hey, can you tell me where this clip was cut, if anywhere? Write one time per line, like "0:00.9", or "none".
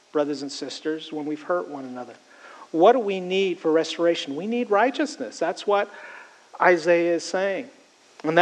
none